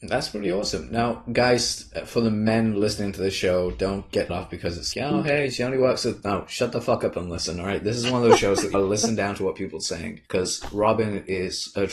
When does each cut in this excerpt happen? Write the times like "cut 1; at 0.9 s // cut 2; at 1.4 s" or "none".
cut 1; at 4.3 s // cut 2; at 4.9 s // cut 3; at 8.7 s // cut 4; at 10.3 s

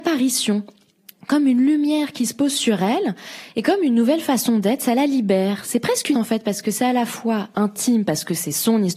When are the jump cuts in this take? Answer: cut 1; at 6.1 s

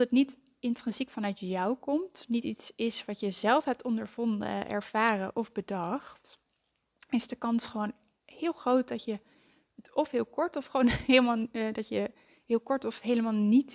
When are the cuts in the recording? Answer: none

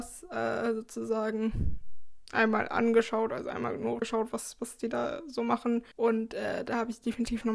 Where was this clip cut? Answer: cut 1; at 4.0 s // cut 2; at 5.9 s

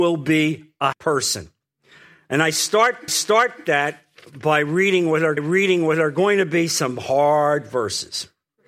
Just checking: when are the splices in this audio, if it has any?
cut 1; at 0.9 s // cut 2; at 3.1 s // cut 3; at 5.4 s

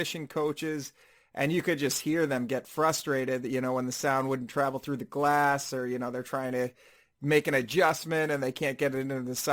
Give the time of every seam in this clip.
none

